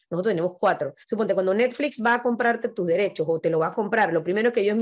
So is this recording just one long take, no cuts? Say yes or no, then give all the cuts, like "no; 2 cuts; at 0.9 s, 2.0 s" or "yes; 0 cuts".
no; 1 cut; at 1.0 s